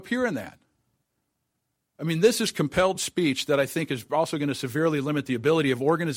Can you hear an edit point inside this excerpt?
no; 0 cuts

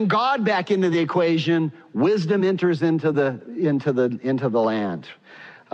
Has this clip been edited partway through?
no; 0 cuts

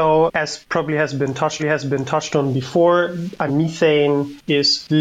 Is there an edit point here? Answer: yes; 2 cuts; at 1.6 s, 3.5 s

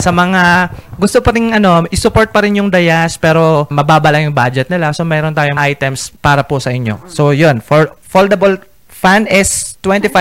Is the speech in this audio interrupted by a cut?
yes; 3 cuts; at 3.7 s, 5.6 s, 6.2 s

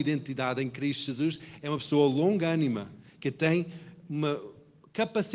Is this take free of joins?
yes; 0 cuts

